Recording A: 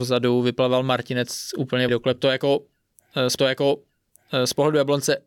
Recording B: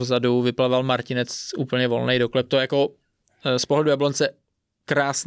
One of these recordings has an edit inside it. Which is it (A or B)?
A